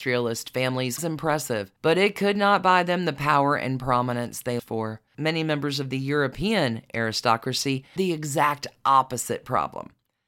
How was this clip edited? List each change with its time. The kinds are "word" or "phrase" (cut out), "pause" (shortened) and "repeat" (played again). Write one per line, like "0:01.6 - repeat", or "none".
0:01.0 - word
0:01.8 - pause
0:04.6 - word
0:05.1 - pause
0:08.0 - word

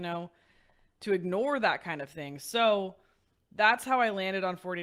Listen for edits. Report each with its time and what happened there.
none

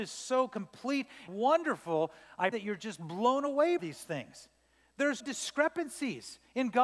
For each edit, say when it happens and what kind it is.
0:01.3 - word
0:02.5 - word
0:03.8 - word
0:05.2 - word

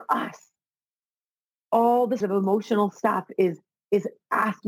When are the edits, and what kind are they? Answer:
0:02.2 - word

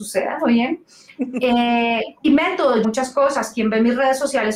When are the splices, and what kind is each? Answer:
0:02.2 - phrase
0:02.8 - phrase

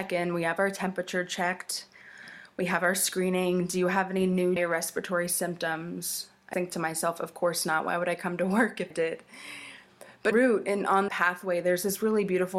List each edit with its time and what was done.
0:04.6 - word
0:06.5 - word
0:08.9 - word
0:10.3 - word
0:11.1 - word

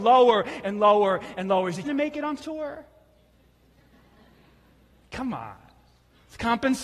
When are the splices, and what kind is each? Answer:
0:01.8 - word
0:02.4 - word

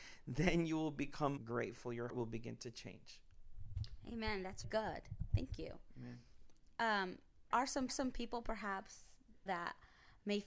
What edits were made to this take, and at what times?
0:01.4 - word
0:02.1 - word
0:04.6 - word
0:07.5 - word
0:07.9 - repeat
0:09.5 - word

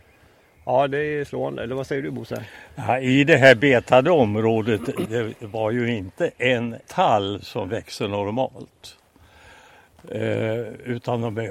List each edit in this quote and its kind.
0:05.1 - word
0:06.8 - word

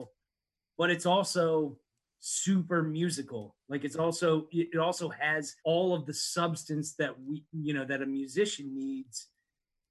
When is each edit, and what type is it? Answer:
0:05.6 - pause

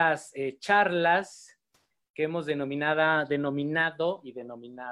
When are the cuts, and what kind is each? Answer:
none

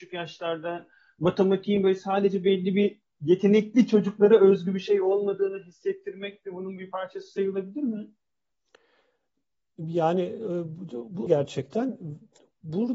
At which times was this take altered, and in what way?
0:11.3 - word

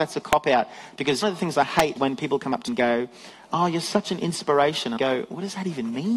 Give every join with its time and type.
0:01.2 - word
0:02.0 - word
0:02.7 - word
0:05.0 - word

